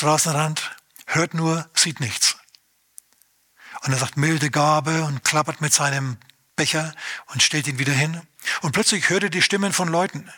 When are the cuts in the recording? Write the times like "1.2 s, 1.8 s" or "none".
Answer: none